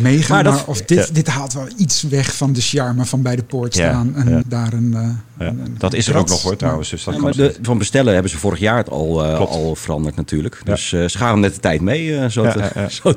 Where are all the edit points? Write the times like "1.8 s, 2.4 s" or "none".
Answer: 4.4 s, 7.3 s, 7.6 s